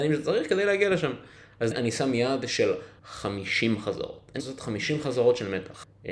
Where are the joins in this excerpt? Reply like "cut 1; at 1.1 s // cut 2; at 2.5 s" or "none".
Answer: cut 1; at 1.7 s // cut 2; at 4.4 s